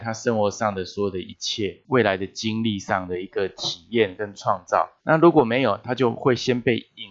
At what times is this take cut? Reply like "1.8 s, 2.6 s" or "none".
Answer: 5.0 s